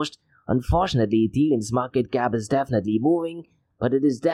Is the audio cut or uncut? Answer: uncut